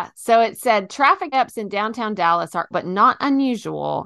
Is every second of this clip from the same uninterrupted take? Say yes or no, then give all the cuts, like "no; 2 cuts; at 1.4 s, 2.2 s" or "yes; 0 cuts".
no; 2 cuts; at 1.3 s, 2.7 s